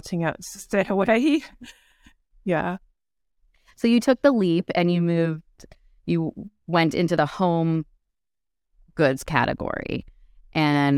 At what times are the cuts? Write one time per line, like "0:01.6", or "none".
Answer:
none